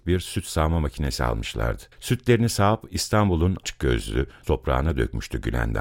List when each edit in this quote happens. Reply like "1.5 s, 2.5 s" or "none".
1.9 s, 3.6 s, 4.4 s